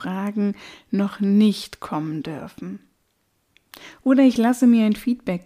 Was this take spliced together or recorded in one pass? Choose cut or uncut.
uncut